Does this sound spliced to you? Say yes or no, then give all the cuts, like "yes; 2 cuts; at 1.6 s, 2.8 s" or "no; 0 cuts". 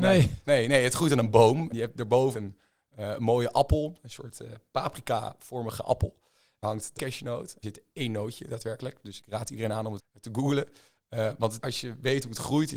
yes; 8 cuts; at 1.7 s, 2.3 s, 6.6 s, 7.0 s, 7.6 s, 9.2 s, 10.0 s, 11.6 s